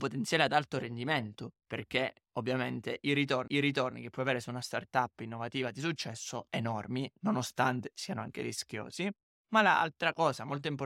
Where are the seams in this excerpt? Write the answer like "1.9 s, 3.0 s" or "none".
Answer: 1.6 s, 3.5 s, 6.5 s

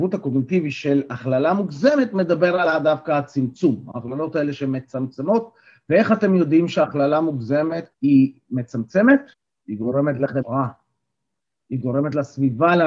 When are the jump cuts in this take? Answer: 7.9 s, 9.3 s, 10.4 s

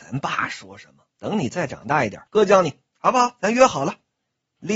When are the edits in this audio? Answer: 1.1 s, 2.3 s, 2.9 s

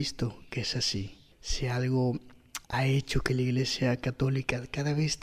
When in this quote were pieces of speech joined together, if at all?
1.3 s, 2.6 s

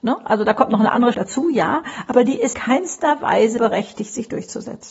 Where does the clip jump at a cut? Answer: 1.1 s, 2.5 s, 3.6 s

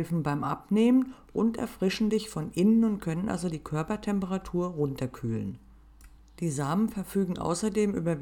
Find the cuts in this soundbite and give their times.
none

